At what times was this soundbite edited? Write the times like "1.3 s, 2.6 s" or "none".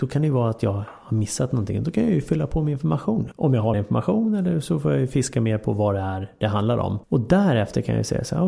3.7 s, 7.0 s

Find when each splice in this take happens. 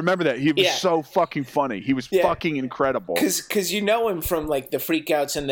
none

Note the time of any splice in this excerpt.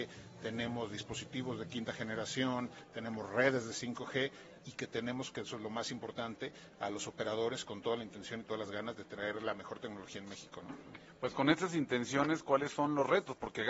none

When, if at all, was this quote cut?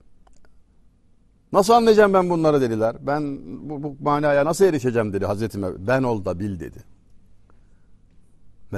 none

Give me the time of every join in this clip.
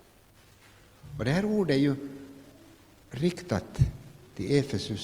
none

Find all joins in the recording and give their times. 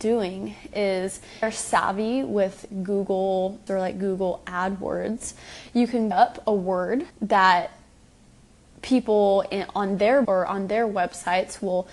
1.4 s, 3.7 s, 6.1 s, 7.1 s, 10.2 s

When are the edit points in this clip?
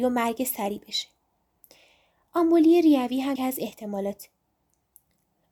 3.4 s

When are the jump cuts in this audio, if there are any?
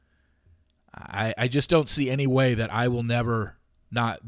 none

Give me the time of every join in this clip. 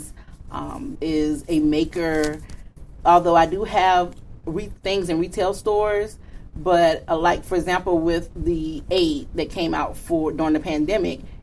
0.9 s

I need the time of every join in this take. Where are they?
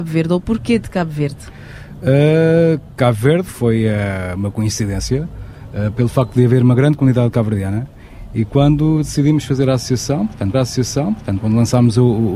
3.5 s, 10.5 s

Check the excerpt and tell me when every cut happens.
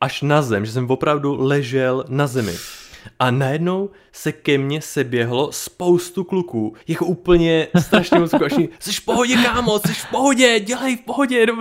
6.8 s, 8.8 s

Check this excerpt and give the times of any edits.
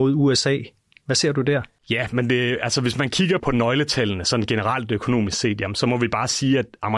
3.4 s

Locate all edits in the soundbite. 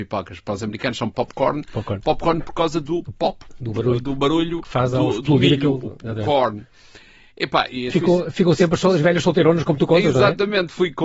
7.9 s

